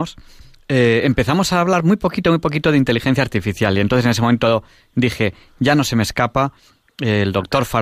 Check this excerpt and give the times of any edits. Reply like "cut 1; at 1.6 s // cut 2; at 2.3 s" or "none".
none

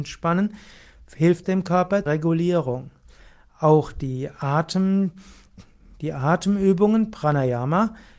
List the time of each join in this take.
cut 1; at 1.4 s // cut 2; at 2.1 s

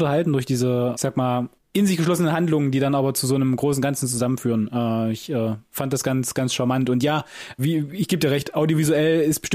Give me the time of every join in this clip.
cut 1; at 0.9 s // cut 2; at 1.6 s // cut 3; at 7.6 s

